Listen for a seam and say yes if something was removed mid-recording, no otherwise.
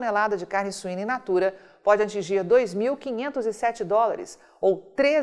no